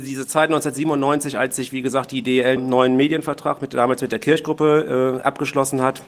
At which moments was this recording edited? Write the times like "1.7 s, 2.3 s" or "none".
2.6 s